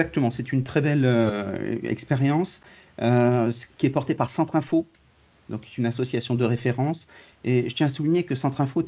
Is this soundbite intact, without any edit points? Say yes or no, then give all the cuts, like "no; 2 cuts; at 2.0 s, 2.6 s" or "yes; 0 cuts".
yes; 0 cuts